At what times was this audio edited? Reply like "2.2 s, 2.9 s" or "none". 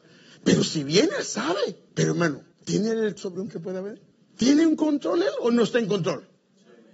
1.9 s, 2.5 s, 3.2 s, 3.5 s, 4.1 s